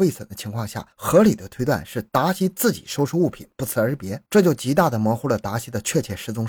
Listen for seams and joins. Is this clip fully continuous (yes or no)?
no